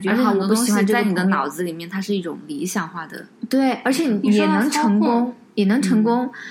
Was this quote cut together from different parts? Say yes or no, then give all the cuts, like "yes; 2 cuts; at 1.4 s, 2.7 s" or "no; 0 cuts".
no; 0 cuts